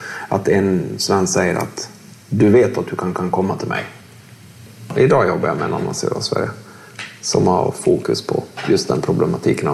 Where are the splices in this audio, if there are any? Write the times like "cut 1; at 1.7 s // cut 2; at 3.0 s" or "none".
cut 1; at 3.1 s

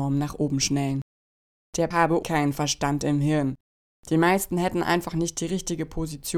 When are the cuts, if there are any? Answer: cut 1; at 1.9 s // cut 2; at 2.2 s

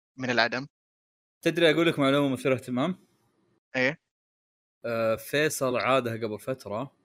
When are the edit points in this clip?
none

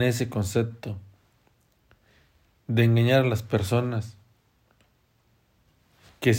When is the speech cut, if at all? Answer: none

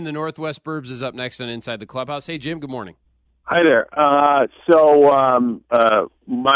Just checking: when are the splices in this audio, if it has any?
none

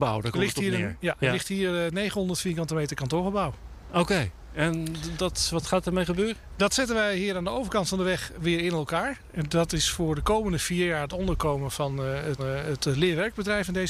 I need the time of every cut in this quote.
cut 1; at 5.2 s // cut 2; at 12.4 s

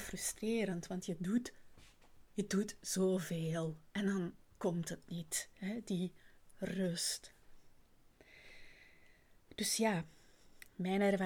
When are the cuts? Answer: cut 1; at 2.3 s // cut 2; at 3.9 s // cut 3; at 4.4 s

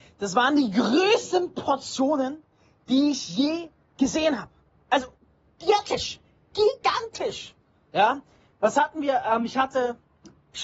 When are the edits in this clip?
none

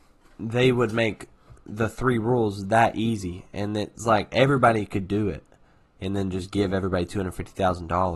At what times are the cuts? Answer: none

